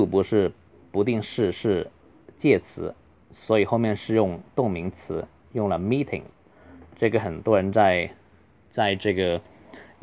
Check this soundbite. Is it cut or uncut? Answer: uncut